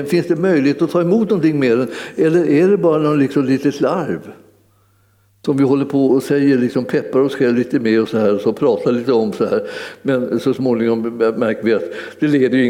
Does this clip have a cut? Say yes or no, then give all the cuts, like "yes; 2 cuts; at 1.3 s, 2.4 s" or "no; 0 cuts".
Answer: no; 0 cuts